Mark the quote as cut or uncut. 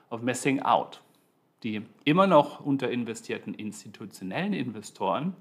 uncut